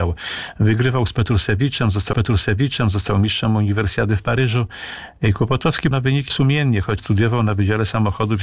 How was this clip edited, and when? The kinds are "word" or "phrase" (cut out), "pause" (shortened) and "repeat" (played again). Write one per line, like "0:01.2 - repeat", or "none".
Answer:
0:02.1 - repeat
0:05.9 - word
0:06.3 - word
0:07.0 - word